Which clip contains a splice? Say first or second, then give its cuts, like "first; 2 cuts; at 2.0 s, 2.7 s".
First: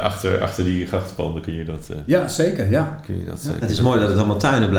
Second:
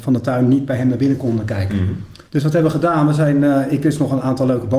second; 1 cut; at 2.3 s